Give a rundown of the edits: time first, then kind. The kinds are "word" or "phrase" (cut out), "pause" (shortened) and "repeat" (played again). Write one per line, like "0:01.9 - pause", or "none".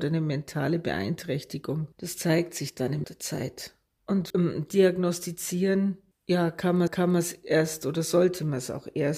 0:01.9 - pause
0:03.0 - word
0:04.3 - word
0:06.9 - repeat